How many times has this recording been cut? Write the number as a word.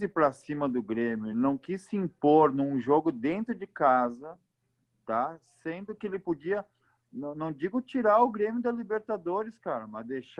zero